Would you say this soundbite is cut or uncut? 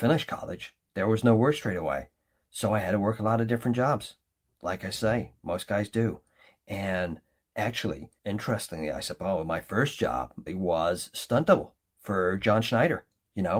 cut